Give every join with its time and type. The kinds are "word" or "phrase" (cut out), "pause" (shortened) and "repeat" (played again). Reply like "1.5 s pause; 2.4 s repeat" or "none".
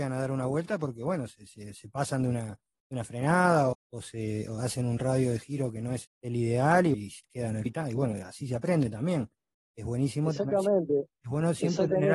3.7 s word; 6.0 s word; 6.9 s word; 7.7 s word